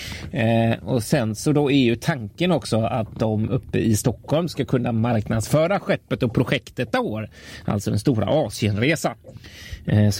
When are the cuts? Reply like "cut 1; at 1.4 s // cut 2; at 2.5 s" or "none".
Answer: cut 1; at 6.9 s

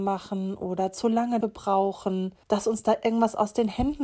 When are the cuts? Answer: cut 1; at 1.4 s // cut 2; at 2.4 s

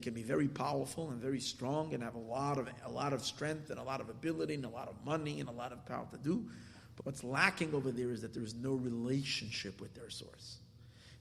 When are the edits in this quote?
cut 1; at 7.0 s

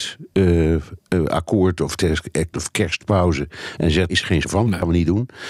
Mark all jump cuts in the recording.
cut 1; at 2.0 s // cut 2; at 2.5 s // cut 3; at 4.1 s // cut 4; at 4.4 s

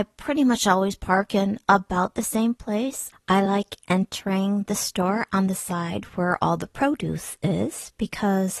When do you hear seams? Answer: none

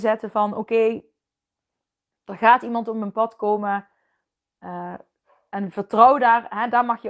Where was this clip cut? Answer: none

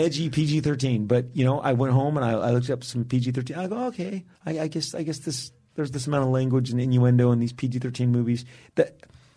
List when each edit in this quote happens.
cut 1; at 4.3 s

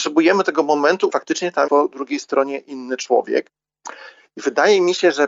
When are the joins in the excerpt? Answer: cut 1; at 1.1 s // cut 2; at 1.7 s

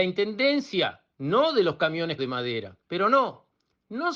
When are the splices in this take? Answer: cut 1; at 1.1 s // cut 2; at 2.2 s // cut 3; at 2.8 s

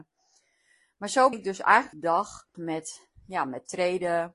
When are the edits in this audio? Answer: cut 1; at 1.3 s // cut 2; at 1.9 s // cut 3; at 2.5 s

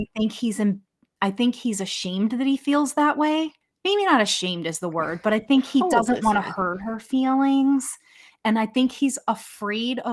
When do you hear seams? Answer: none

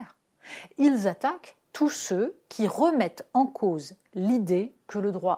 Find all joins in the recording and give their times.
cut 1; at 1.6 s

